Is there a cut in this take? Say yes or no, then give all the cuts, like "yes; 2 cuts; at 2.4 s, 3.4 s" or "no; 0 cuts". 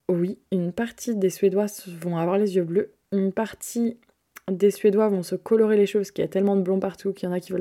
no; 0 cuts